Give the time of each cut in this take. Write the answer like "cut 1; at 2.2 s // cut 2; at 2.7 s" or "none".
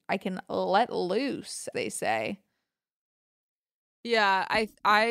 cut 1; at 1.7 s

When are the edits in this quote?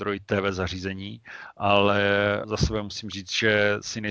cut 1; at 2.4 s

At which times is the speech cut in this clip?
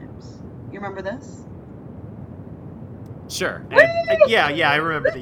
cut 1; at 3.7 s

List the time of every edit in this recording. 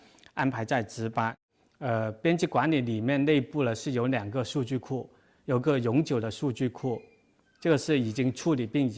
none

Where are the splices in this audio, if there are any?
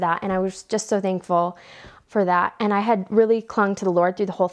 cut 1; at 2.1 s

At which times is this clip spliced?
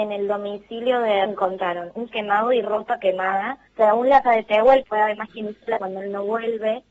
cut 1; at 1.3 s // cut 2; at 2.1 s // cut 3; at 3.7 s // cut 4; at 4.2 s // cut 5; at 4.8 s // cut 6; at 5.8 s

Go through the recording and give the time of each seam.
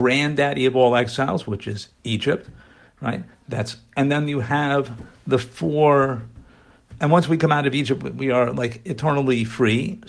none

